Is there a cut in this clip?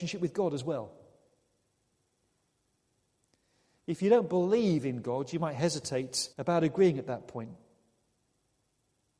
yes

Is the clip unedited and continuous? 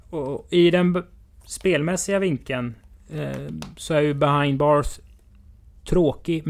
yes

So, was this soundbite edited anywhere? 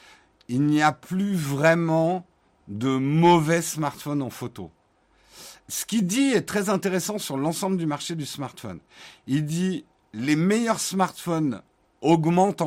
no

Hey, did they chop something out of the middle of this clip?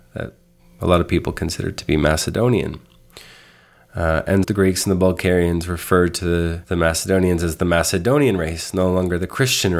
yes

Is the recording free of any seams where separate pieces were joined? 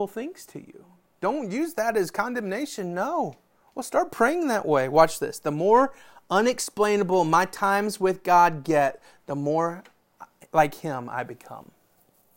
yes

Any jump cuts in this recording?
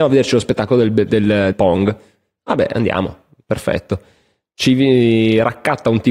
yes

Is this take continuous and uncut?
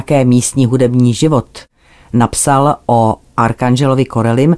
yes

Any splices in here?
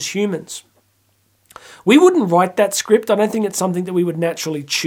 no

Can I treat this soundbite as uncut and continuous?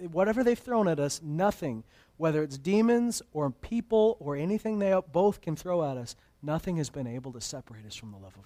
yes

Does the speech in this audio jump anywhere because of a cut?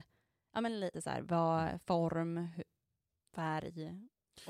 yes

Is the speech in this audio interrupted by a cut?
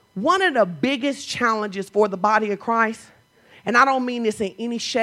no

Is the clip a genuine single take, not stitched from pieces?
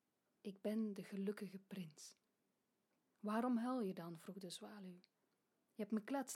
yes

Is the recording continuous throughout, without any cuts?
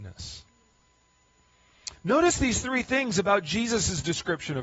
yes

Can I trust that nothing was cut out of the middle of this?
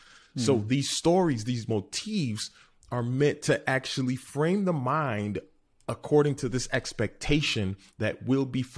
yes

